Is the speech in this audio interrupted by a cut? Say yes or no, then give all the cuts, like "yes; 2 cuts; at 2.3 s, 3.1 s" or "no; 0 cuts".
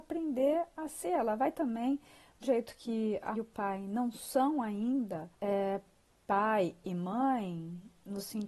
yes; 3 cuts; at 2.4 s, 3.3 s, 5.3 s